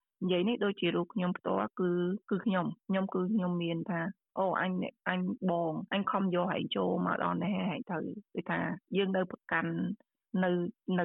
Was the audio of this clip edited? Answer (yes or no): yes